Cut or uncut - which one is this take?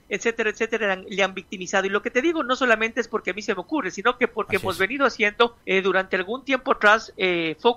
cut